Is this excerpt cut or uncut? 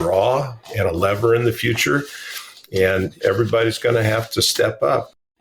uncut